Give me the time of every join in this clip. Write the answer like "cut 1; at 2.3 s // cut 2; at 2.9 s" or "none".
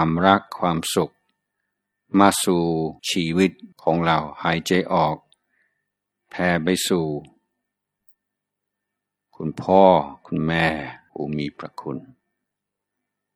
cut 1; at 3.0 s // cut 2; at 3.7 s // cut 3; at 11.1 s